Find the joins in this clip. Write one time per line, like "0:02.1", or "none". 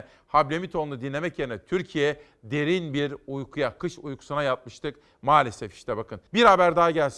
0:06.3